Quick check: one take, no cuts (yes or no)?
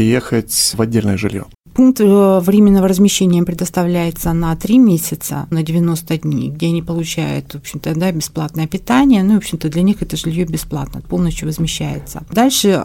no